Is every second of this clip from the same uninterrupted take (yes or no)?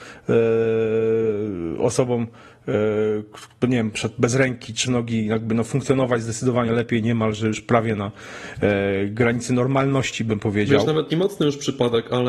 no